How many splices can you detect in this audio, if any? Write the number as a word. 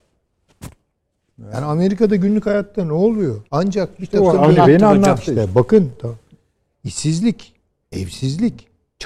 one